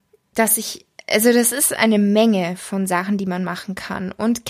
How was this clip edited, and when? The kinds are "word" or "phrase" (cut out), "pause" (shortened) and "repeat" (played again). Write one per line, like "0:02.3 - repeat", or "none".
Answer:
none